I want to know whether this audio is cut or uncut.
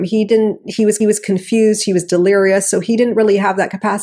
cut